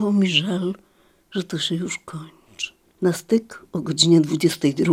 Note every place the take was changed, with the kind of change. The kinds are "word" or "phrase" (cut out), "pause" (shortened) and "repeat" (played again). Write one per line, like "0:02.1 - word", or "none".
0:02.8 - pause